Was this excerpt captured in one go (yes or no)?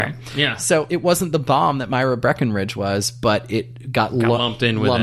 yes